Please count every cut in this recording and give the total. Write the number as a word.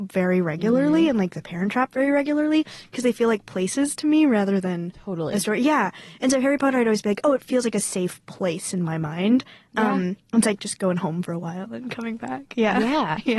zero